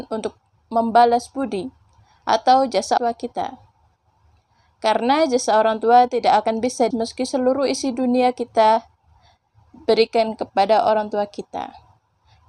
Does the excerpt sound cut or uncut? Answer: cut